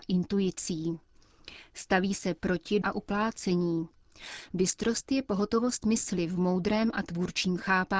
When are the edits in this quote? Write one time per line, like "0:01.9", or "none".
0:02.8